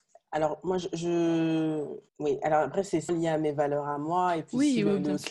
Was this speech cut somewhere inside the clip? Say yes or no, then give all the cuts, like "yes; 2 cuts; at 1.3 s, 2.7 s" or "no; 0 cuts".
yes; 2 cuts; at 2.1 s, 3.1 s